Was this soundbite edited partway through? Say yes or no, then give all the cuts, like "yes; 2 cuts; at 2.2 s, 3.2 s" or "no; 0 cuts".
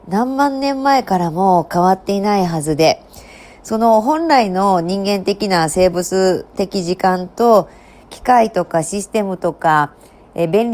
no; 0 cuts